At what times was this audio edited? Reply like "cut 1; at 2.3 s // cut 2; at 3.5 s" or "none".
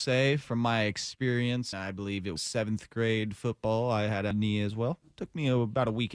cut 1; at 1.7 s // cut 2; at 2.4 s // cut 3; at 4.3 s